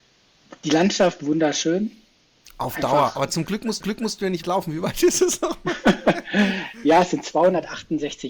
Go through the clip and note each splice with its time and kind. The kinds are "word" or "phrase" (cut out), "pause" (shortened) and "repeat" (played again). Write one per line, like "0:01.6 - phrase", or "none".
0:03.8 - repeat
0:04.4 - word

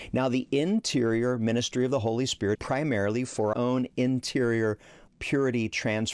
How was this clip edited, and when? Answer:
0:02.5 - word
0:03.5 - word
0:05.1 - word

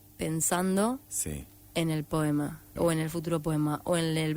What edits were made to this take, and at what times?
0:02.8 - word

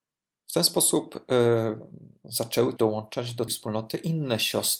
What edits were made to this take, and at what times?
0:02.8 - word
0:03.5 - word

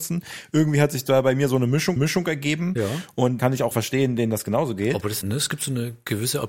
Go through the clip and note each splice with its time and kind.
0:02.0 - repeat
0:03.4 - word
0:03.7 - word
0:05.2 - phrase

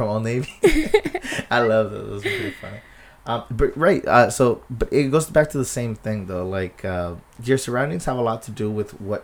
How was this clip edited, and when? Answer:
none

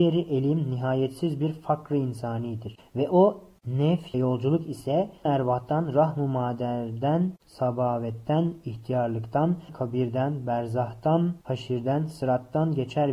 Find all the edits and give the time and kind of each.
0:04.1 - word
0:05.3 - word
0:09.7 - word
0:11.4 - pause

